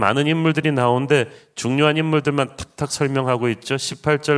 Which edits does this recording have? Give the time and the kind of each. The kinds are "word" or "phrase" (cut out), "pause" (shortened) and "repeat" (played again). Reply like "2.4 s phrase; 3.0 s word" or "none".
none